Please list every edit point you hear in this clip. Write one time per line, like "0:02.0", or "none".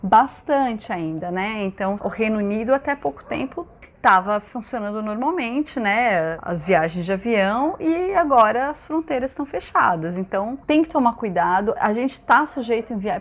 0:10.6